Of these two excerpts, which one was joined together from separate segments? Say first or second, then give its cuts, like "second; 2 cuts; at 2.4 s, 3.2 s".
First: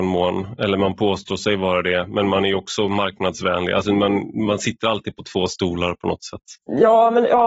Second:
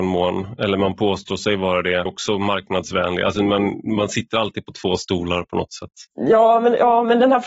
second; 1 cut; at 2.1 s